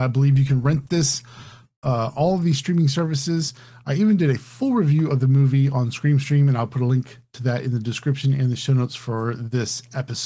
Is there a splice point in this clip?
yes; 1 cut; at 2.1 s

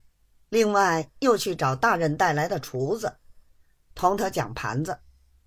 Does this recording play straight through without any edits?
yes; 0 cuts

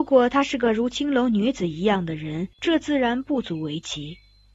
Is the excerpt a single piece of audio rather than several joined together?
no; 1 cut; at 2.5 s

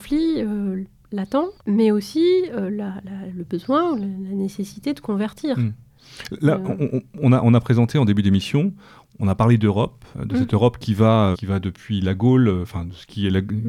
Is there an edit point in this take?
yes; 3 cuts; at 1.6 s, 10.1 s, 11.3 s

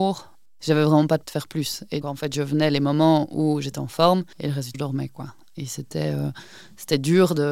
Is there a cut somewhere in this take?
yes; 4 cuts; at 1.2 s, 2.0 s, 4.3 s, 4.7 s

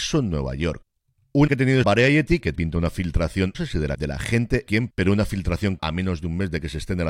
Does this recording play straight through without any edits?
no; 7 cuts; at 1.5 s, 1.8 s, 2.5 s, 3.5 s, 3.9 s, 4.7 s, 5.8 s

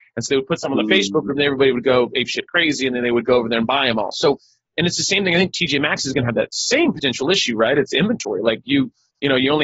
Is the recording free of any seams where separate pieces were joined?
yes; 0 cuts

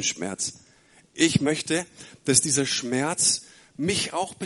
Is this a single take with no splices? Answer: yes; 0 cuts

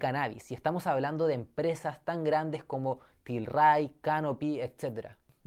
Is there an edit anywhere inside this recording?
no; 0 cuts

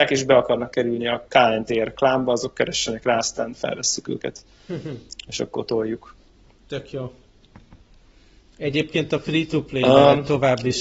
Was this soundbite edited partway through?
no; 0 cuts

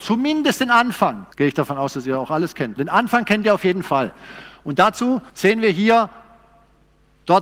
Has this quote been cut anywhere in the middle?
yes; 3 cuts; at 1.3 s, 2.8 s, 5.3 s

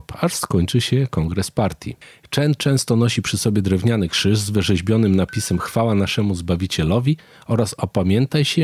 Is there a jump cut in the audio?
no; 0 cuts

